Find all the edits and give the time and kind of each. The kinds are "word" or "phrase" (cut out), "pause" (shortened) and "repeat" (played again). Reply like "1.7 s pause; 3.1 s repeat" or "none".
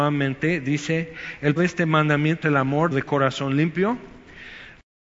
1.6 s word; 2.4 s word; 2.9 s word